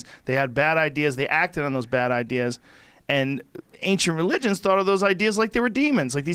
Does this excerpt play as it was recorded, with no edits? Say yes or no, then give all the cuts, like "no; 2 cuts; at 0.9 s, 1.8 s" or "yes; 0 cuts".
yes; 0 cuts